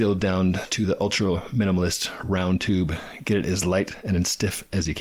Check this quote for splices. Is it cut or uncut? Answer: uncut